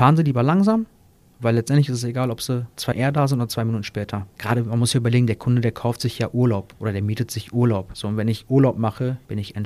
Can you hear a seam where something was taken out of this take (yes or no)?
yes